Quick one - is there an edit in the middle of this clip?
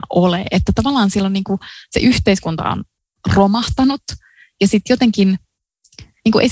no; 0 cuts

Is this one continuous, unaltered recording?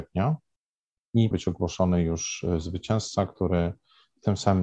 no; 1 cut; at 1.3 s

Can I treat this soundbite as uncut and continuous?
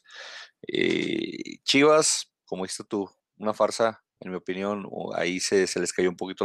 no; 1 cut; at 4.1 s

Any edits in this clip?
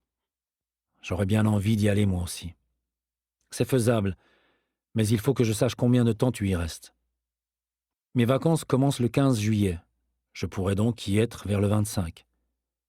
no; 0 cuts

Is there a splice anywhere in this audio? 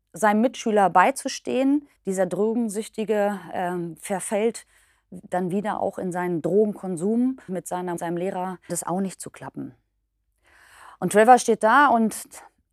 yes; 4 cuts; at 2.0 s, 7.5 s, 8.0 s, 8.7 s

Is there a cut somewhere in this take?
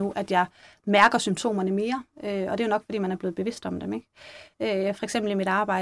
no; 0 cuts

